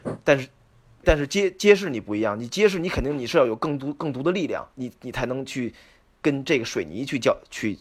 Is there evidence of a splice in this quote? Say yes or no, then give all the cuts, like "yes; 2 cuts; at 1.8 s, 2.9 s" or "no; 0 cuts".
yes; 2 cuts; at 1.0 s, 4.7 s